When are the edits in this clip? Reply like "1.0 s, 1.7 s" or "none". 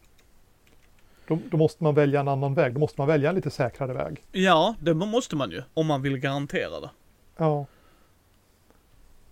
4.3 s, 5.7 s